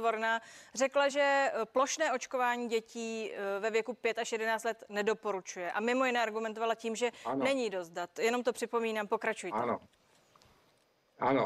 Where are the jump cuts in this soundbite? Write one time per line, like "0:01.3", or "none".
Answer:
none